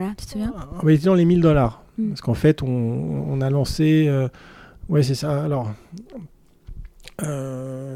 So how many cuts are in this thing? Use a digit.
0